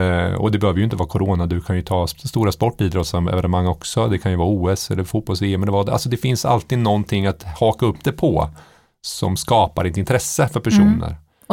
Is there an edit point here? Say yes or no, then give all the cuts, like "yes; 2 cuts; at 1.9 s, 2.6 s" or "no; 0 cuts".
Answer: no; 0 cuts